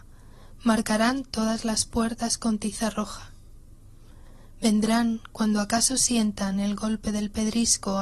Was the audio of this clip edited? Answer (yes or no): no